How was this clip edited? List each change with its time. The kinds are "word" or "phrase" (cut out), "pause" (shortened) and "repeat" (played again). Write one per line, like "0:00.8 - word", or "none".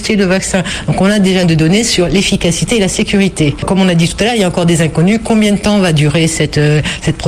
0:01.4 - word